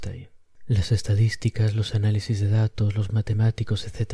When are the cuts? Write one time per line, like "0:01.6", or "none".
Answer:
0:03.1